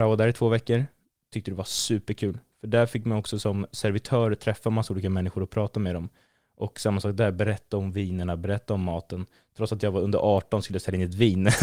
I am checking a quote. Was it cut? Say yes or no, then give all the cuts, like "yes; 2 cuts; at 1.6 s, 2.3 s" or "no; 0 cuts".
no; 0 cuts